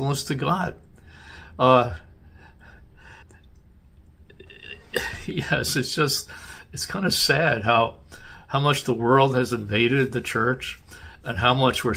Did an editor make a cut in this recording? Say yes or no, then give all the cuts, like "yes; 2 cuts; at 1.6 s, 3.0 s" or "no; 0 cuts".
yes; 1 cut; at 3.2 s